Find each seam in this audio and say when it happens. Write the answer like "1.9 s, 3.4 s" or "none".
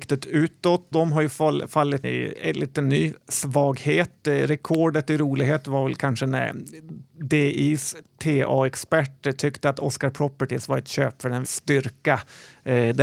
0.9 s, 2.0 s, 11.4 s